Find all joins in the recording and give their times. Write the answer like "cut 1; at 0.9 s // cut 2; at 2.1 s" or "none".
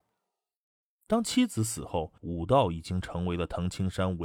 cut 1; at 2.2 s